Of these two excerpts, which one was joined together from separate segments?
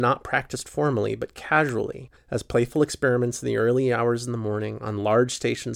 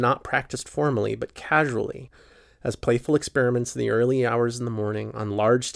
first; 1 cut; at 2.2 s

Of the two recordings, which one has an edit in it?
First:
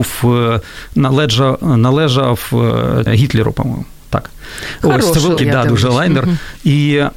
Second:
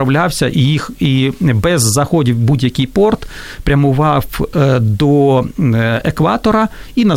first; 2 cuts; at 3.1 s, 5.4 s

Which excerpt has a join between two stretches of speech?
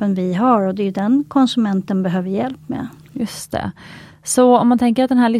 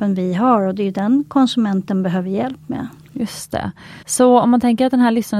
second; 1 cut; at 4.0 s

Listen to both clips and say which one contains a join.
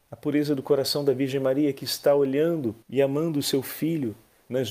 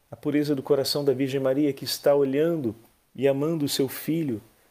first; 1 cut; at 2.8 s

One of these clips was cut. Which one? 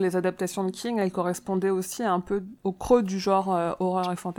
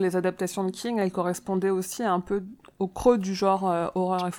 first; 1 cut; at 2.6 s

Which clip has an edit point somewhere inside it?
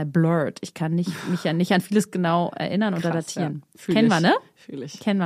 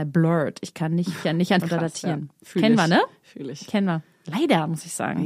second; 2 cuts; at 1.2 s, 1.6 s

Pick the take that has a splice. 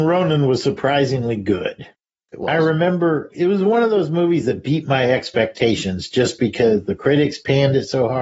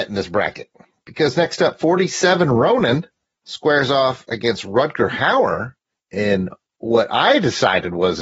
first; 1 cut; at 3.3 s

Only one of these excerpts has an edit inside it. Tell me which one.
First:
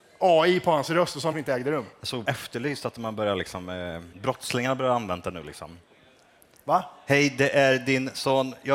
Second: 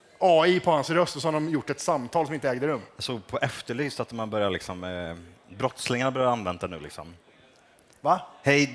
first; 3 cuts; at 1.3 s, 2.2 s, 4.1 s

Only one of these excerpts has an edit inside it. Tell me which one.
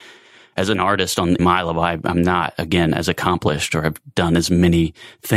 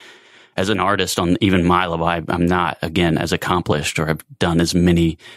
first; 1 cut; at 1.4 s

